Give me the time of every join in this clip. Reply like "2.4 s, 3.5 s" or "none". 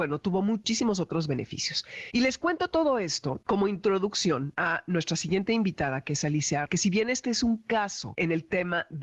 6.7 s

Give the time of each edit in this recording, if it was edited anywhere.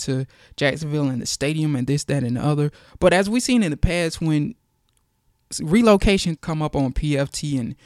6.4 s

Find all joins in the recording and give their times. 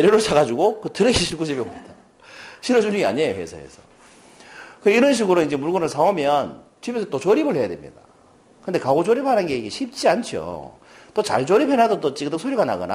none

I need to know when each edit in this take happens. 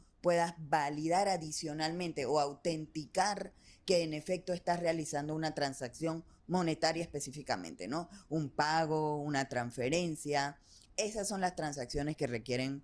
none

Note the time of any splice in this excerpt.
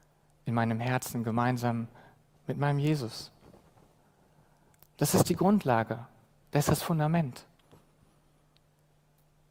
none

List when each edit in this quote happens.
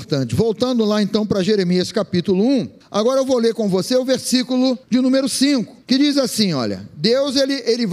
2.8 s, 4.8 s, 5.8 s

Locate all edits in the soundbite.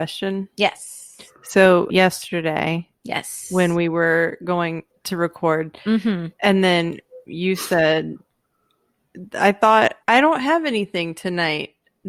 1.9 s, 4.9 s, 6.3 s, 7.3 s, 10.0 s

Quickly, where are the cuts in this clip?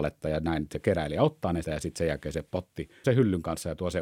1.6 s, 3.0 s

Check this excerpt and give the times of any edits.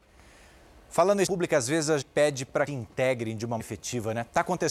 1.3 s, 2.0 s, 2.7 s, 3.6 s

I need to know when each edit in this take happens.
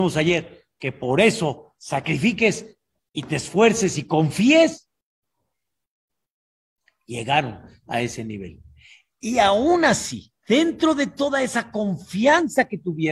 10.4 s

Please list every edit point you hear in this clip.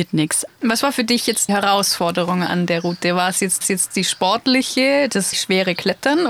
1.5 s, 3.6 s, 5.3 s

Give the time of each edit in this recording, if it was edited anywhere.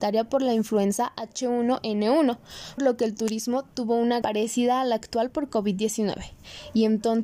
2.8 s, 4.2 s

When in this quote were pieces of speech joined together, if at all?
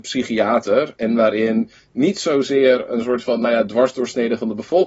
none

